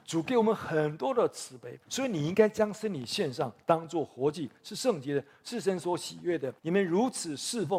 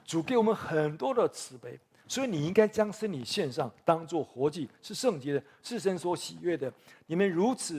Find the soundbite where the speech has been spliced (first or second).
first